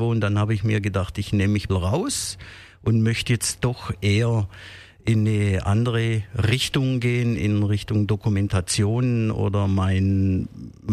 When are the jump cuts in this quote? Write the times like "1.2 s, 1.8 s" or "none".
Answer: 1.7 s